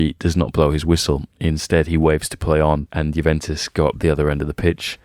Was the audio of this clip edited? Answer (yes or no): no